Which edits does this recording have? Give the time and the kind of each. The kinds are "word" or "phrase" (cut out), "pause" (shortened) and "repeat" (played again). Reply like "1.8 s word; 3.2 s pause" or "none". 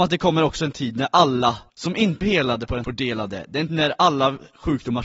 1.7 s pause; 2.2 s word; 2.8 s phrase; 3.7 s word